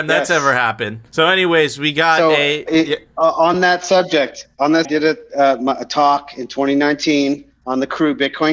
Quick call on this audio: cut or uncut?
cut